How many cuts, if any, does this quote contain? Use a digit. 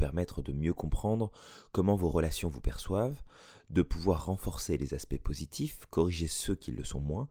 0